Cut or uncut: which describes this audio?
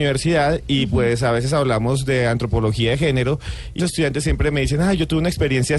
cut